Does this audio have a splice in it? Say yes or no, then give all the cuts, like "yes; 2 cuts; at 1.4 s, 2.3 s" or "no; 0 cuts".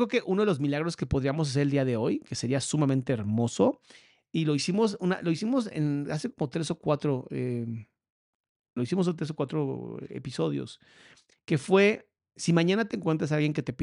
no; 0 cuts